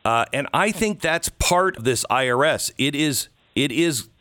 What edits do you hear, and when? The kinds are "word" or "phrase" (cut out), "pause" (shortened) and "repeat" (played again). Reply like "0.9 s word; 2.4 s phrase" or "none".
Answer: 1.8 s word